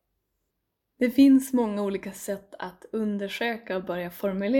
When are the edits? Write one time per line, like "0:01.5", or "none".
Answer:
none